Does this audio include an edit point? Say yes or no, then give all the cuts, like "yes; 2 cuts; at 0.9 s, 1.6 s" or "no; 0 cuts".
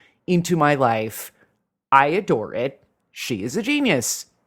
no; 0 cuts